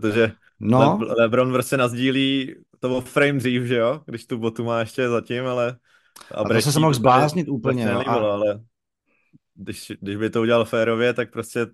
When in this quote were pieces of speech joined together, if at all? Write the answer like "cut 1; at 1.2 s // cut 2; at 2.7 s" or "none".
none